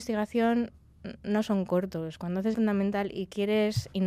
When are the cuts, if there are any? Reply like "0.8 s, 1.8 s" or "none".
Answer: 2.5 s

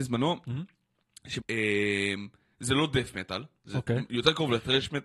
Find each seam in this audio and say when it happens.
1.4 s

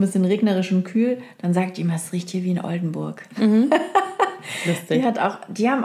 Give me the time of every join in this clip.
none

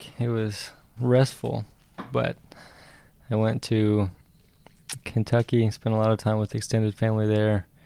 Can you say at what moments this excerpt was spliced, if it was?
1.0 s

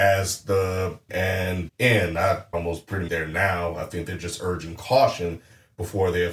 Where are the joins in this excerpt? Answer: 1.1 s, 1.7 s, 2.5 s, 3.1 s

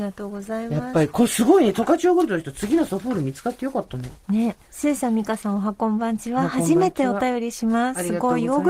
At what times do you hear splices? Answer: 4.6 s

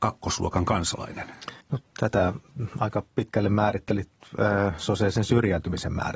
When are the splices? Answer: 1.6 s

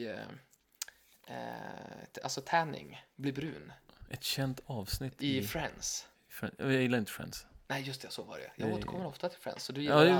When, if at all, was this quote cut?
3.1 s

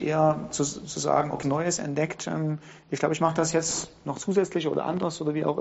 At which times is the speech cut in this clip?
1.4 s

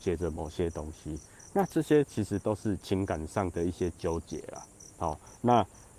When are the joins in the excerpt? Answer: none

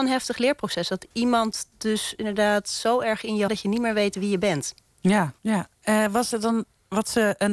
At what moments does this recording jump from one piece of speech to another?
3.5 s, 5.4 s, 6.3 s

